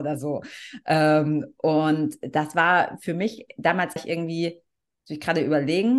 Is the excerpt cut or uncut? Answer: cut